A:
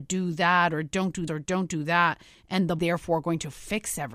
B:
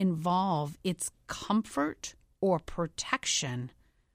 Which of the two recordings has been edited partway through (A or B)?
A